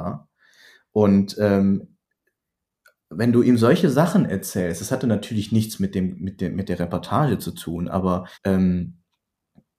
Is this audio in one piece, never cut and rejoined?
no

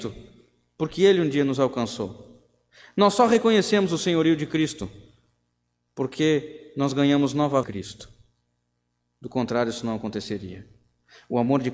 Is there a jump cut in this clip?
yes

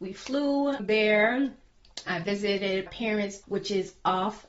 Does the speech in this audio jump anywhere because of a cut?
yes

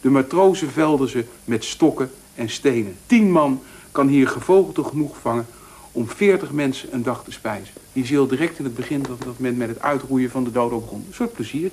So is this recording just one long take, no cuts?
no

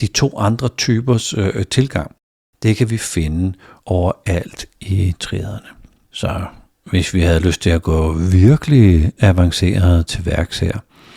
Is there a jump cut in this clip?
no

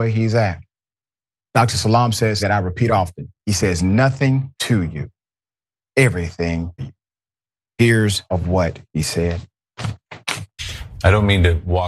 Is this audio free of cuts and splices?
no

